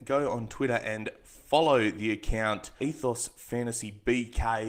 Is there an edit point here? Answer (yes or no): yes